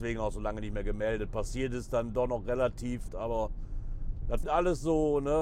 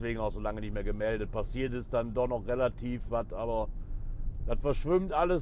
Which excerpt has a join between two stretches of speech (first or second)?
first